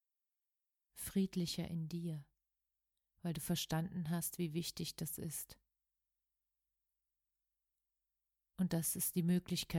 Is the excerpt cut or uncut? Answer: uncut